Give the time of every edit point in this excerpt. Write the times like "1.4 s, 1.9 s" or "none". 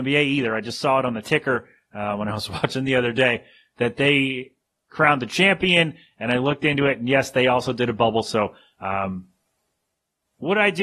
none